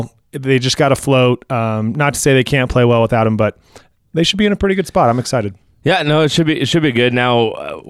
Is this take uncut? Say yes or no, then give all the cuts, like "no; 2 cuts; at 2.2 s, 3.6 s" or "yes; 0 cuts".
yes; 0 cuts